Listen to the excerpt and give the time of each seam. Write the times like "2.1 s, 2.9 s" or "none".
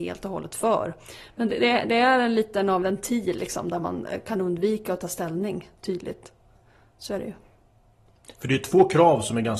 2.8 s